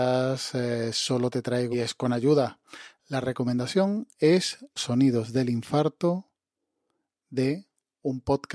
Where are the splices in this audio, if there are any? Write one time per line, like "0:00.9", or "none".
0:01.7
0:04.8